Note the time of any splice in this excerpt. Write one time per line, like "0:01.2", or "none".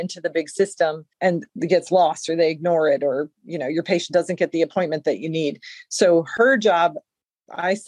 0:01.1